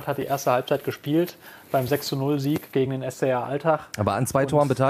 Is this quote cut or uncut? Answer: uncut